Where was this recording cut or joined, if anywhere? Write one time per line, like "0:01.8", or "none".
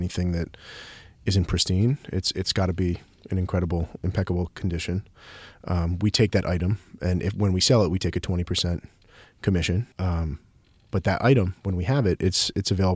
0:09.9